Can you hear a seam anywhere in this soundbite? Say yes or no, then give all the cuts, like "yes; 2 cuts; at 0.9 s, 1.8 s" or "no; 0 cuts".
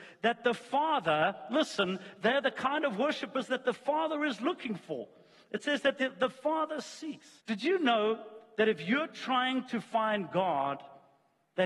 yes; 1 cut; at 7.4 s